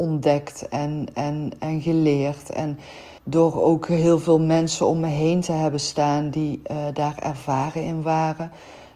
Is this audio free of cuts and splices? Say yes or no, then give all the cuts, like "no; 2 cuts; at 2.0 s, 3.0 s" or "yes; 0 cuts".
no; 2 cuts; at 1.1 s, 3.2 s